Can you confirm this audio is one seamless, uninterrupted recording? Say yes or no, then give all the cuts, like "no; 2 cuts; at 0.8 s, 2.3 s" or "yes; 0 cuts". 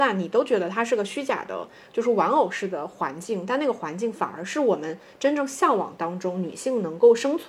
yes; 0 cuts